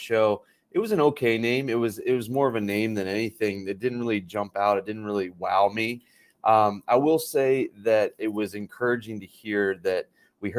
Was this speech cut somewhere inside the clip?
no; 0 cuts

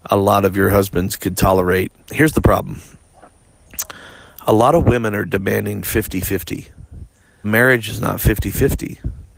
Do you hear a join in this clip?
yes; 2 cuts; at 2.0 s, 7.4 s

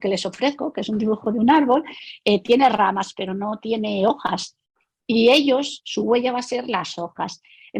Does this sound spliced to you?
no; 0 cuts

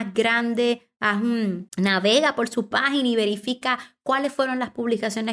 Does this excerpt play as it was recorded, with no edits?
no; 1 cut; at 1.7 s

